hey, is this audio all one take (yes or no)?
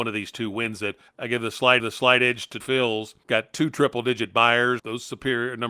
no